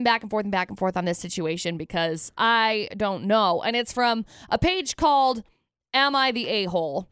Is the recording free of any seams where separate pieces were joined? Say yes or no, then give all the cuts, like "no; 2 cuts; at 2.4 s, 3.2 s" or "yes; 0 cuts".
yes; 0 cuts